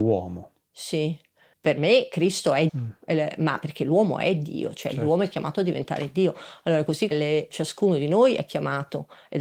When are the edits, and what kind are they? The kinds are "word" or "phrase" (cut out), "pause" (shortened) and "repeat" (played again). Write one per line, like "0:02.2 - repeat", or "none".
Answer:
0:01.5 - word
0:02.7 - word
0:07.1 - word
0:07.5 - word

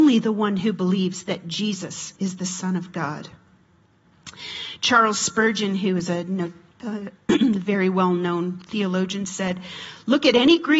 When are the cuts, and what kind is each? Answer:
0:02.2 - pause

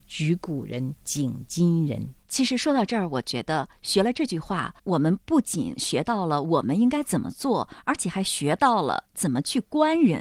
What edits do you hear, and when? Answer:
0:01.0 - pause
0:02.2 - pause
0:04.8 - pause

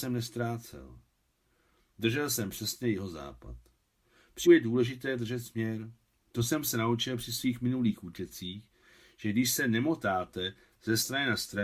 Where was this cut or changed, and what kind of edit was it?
0:04.4 - word

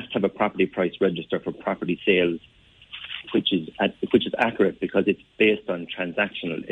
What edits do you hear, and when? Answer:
0:05.3 - pause

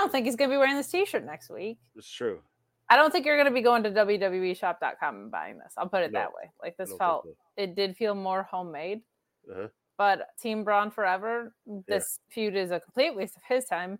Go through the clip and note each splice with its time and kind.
0:01.9 - pause
0:10.3 - word

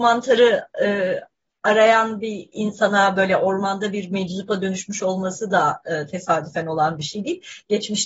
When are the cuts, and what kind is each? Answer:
none

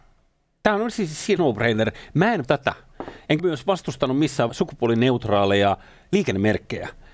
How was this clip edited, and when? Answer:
0:01.4 - word
0:02.4 - word
0:03.4 - word
0:04.5 - word

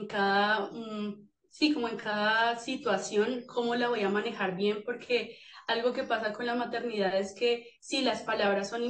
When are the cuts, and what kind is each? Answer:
none

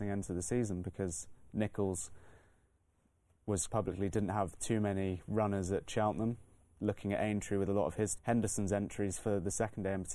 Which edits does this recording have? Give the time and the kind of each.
0:03.7 - word
0:08.1 - phrase

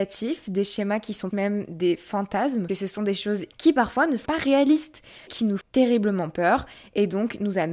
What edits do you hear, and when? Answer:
0:01.3 - word
0:02.7 - word
0:03.5 - word
0:04.3 - word
0:05.3 - word
0:05.6 - word

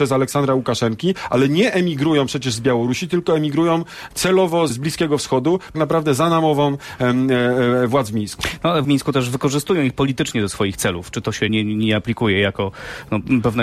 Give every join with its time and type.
0:04.7 - word
0:05.7 - phrase
0:08.8 - word
0:11.5 - word

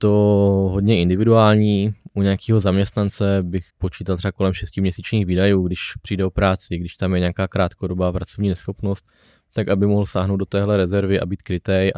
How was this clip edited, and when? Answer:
0:03.7 - pause

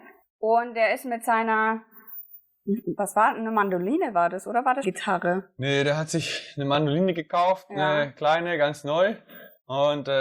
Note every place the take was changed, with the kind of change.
0:04.8 - phrase

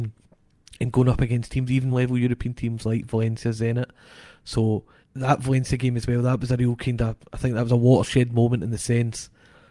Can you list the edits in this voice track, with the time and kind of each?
0:01.9 - phrase
0:05.0 - pause

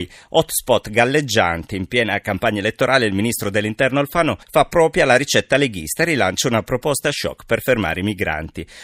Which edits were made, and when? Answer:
0:04.4 - pause

